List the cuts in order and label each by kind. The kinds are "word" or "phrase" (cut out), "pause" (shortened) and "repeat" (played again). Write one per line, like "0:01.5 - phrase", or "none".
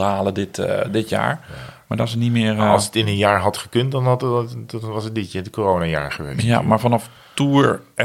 none